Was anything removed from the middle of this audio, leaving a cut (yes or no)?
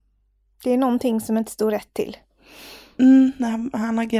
no